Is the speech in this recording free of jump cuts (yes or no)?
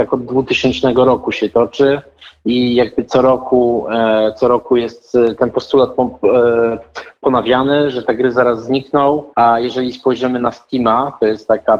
no